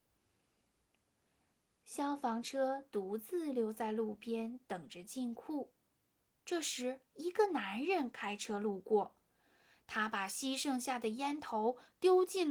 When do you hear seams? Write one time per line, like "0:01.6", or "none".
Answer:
0:07.1